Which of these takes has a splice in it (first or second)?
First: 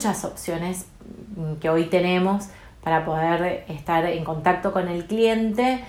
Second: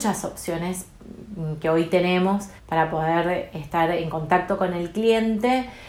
second